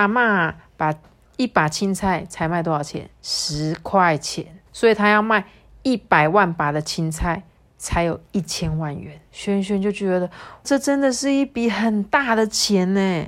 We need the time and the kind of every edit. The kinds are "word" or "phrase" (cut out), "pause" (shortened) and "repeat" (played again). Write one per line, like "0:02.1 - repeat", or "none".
0:01.2 - pause
0:03.1 - pause
0:04.7 - pause
0:09.3 - pause
0:10.6 - word